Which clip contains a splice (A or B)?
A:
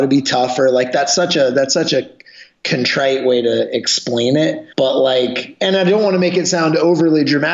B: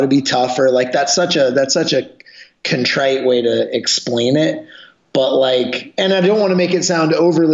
A